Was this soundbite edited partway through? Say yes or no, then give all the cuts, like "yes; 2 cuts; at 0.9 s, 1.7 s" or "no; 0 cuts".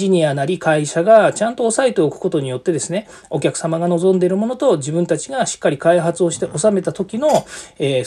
no; 0 cuts